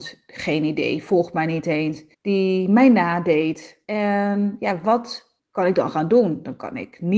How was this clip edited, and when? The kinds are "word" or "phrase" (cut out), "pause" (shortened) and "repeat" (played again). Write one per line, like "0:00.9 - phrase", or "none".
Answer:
0:02.1 - pause
0:03.8 - pause
0:05.4 - pause